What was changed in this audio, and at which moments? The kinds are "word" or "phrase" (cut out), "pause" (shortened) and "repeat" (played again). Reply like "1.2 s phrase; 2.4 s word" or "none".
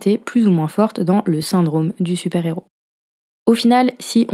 none